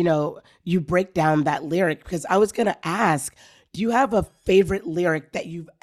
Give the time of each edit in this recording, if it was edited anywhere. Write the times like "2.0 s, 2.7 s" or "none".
none